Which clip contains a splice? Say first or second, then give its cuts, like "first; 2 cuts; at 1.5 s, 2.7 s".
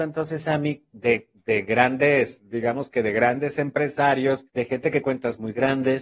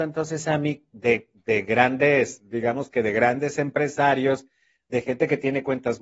first; 2 cuts; at 4.5 s, 5.0 s